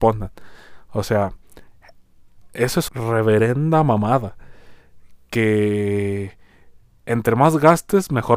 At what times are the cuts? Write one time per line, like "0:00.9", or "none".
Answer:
0:02.4
0:02.9